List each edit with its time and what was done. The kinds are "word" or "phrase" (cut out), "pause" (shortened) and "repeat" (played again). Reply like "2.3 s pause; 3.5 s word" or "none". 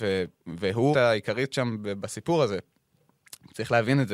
0.9 s word